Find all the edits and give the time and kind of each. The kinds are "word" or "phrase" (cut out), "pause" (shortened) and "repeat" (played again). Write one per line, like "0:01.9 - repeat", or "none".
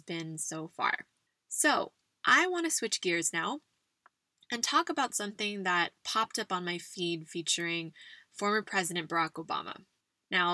none